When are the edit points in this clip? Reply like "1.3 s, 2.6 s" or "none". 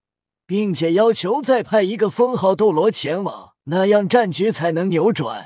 3.6 s